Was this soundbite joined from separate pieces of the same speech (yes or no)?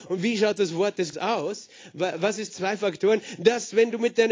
yes